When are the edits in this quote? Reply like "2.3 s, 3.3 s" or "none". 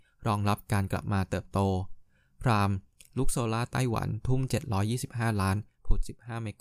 none